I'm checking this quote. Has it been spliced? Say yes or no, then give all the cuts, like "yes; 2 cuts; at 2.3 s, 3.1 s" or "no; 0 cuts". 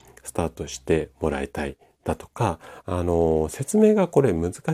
yes; 1 cut; at 2.8 s